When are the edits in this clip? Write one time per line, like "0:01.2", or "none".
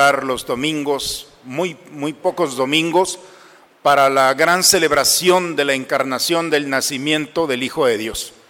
none

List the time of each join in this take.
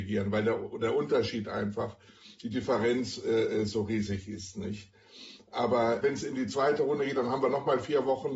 none

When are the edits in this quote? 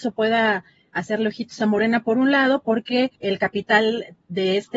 0:03.2

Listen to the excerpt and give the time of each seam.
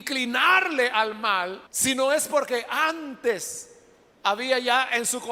0:01.7

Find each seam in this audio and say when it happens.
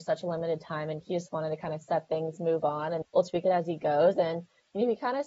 0:01.0
0:03.0

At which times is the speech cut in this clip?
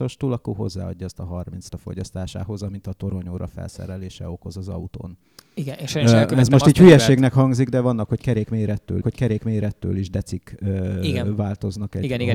0:01.7
0:09.0

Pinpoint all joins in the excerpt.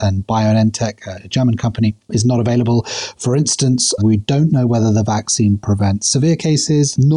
0:04.0

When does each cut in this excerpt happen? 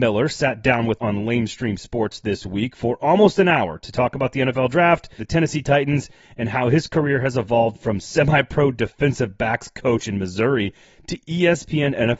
0:01.0
0:05.2

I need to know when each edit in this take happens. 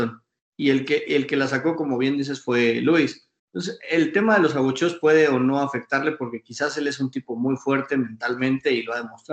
0:03.4

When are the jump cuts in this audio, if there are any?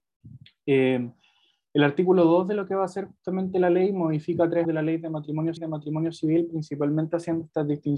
0:04.6
0:05.6

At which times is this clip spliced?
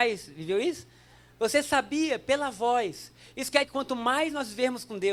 0:03.6

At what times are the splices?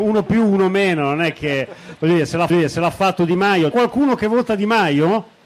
0:02.5
0:03.7

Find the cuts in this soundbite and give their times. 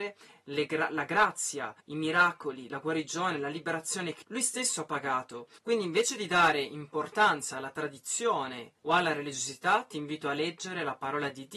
0:01.8
0:04.2
0:08.8

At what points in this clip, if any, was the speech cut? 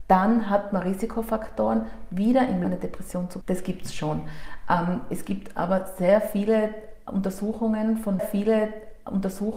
0:02.6
0:03.4
0:08.2

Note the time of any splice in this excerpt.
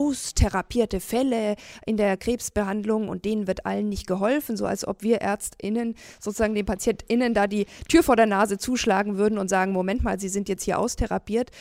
none

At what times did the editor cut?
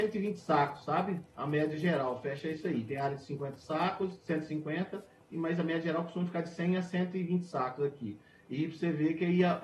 none

